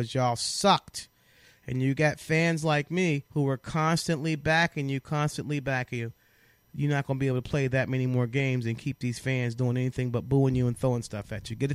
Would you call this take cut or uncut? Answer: cut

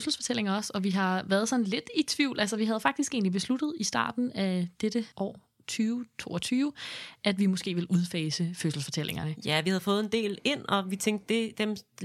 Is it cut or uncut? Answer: cut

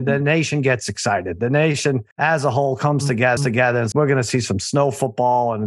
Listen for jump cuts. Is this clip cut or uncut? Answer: cut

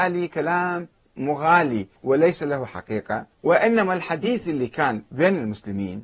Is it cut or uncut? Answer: cut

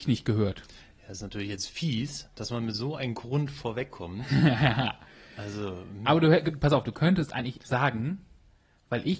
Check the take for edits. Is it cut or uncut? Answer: cut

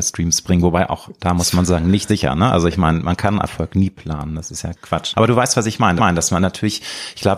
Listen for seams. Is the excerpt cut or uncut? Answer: cut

